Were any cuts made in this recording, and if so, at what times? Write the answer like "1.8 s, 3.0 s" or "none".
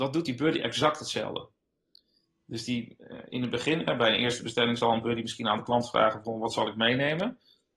none

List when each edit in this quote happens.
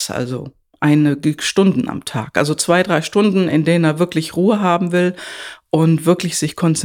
none

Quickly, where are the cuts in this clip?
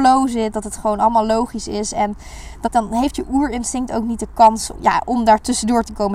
2.6 s, 4.7 s

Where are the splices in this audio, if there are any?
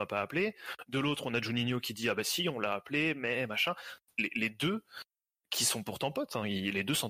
none

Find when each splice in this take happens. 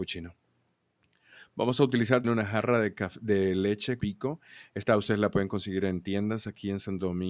2.2 s, 4.0 s

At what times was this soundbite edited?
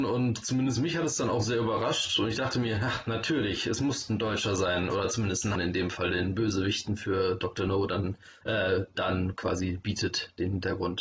5.6 s

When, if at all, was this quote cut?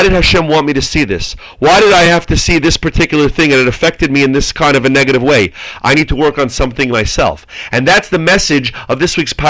none

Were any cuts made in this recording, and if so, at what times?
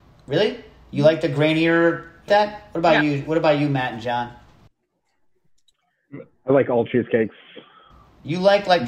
2.3 s

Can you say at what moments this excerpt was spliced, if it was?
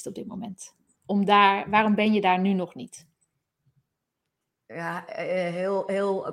none

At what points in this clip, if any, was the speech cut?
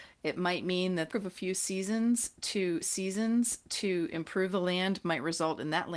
1.1 s, 2.8 s

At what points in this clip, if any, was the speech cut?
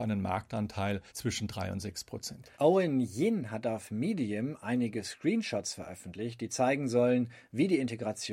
1.1 s, 2.5 s

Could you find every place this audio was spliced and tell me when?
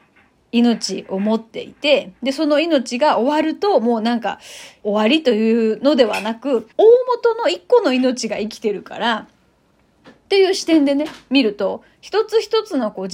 4.8 s, 6.7 s

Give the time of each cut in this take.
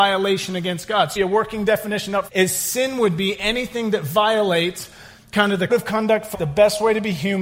1.2 s, 2.3 s, 5.7 s, 6.3 s

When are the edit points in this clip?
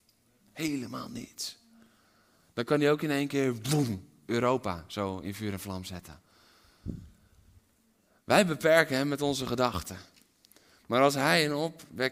none

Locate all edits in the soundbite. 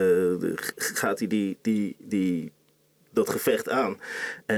none

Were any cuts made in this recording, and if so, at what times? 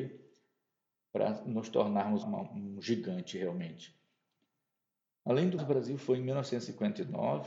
2.2 s, 5.6 s

